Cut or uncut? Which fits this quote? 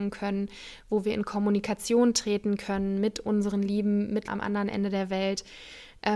cut